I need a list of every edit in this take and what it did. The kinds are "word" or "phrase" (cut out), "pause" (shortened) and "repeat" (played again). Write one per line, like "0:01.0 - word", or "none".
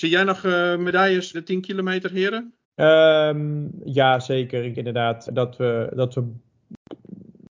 0:01.3 - word
0:02.6 - pause
0:04.7 - word
0:05.3 - word